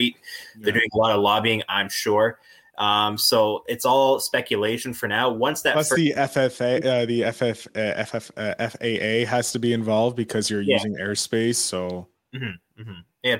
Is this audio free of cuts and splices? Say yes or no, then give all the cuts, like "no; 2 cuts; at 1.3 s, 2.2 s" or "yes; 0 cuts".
yes; 0 cuts